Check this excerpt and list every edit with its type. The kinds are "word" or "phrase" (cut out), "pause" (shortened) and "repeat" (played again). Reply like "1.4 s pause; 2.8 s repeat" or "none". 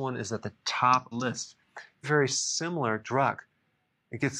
1.1 s phrase; 2.0 s word; 3.0 s phrase